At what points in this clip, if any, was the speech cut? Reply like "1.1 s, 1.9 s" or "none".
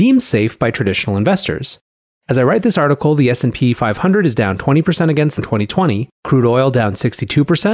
5.4 s, 6.2 s